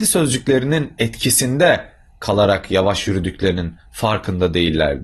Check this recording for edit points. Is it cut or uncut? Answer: uncut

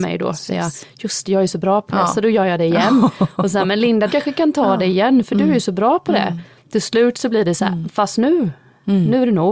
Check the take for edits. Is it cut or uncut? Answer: cut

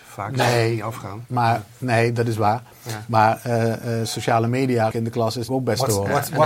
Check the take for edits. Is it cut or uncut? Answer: cut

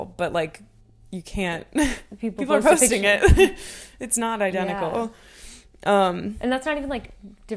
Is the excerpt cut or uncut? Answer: uncut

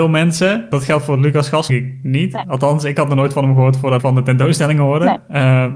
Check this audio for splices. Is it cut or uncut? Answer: cut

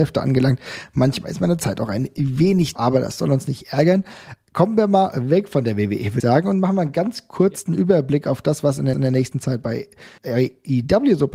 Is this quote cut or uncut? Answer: cut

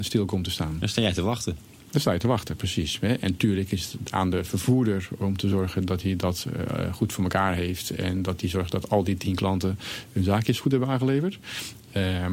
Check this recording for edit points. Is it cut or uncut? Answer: uncut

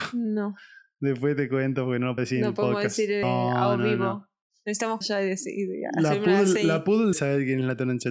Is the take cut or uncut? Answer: cut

